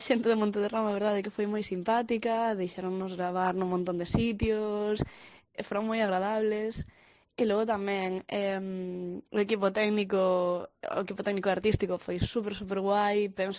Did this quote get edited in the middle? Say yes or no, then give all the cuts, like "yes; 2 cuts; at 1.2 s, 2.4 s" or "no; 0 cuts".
yes; 1 cut; at 5.5 s